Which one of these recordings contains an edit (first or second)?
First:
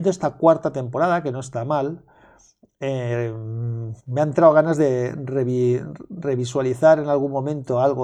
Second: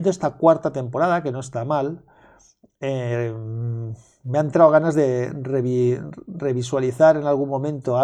first